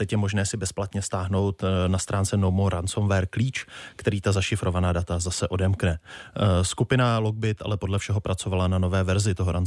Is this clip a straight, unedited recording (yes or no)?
yes